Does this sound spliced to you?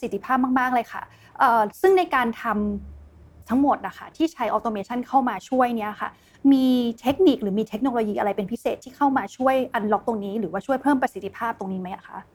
yes; 1 cut; at 3.4 s

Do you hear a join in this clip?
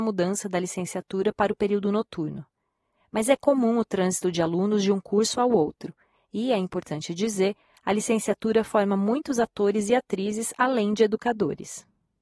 no; 0 cuts

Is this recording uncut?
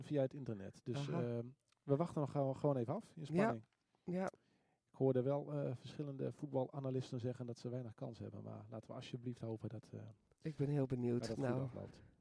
yes; 0 cuts

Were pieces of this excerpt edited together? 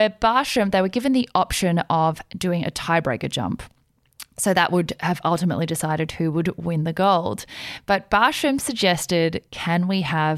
no; 0 cuts

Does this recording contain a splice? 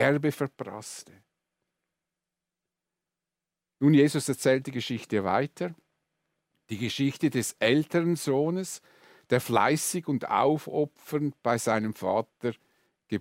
no; 0 cuts

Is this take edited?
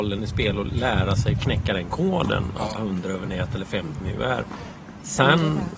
yes; 2 cuts; at 2.8 s, 4.0 s

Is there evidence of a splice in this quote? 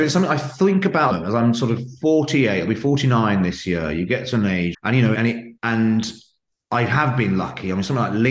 yes; 4 cuts; at 1.1 s, 4.7 s, 5.1 s, 5.6 s

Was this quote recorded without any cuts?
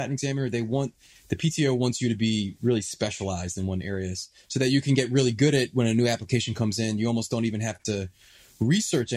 yes; 0 cuts

